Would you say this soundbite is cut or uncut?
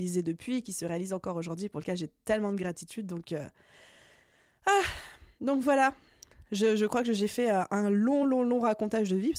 uncut